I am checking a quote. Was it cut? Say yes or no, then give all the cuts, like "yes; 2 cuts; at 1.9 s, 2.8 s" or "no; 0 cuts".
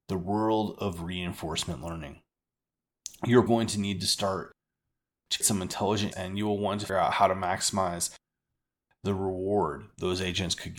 yes; 4 cuts; at 3.5 s, 5.4 s, 6.1 s, 6.9 s